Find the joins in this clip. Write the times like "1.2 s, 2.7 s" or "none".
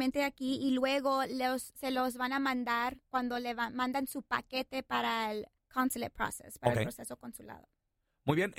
5.6 s

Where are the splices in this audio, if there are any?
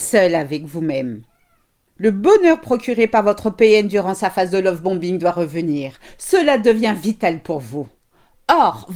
none

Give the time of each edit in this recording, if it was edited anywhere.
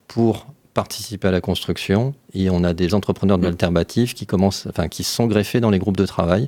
2.9 s

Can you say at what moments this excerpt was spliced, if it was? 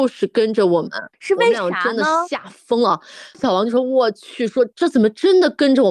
3.3 s

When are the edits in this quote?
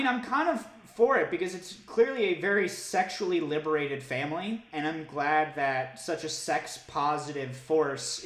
none

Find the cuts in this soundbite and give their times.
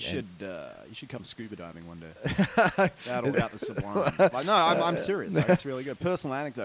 3.3 s

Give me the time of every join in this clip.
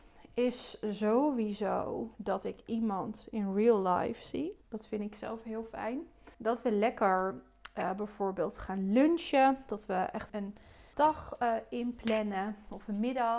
2.1 s, 4.6 s, 6.3 s, 10.3 s, 10.9 s

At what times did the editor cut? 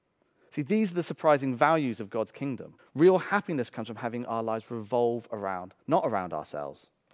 2.8 s, 5.8 s

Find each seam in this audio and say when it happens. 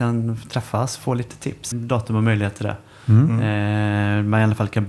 1.7 s

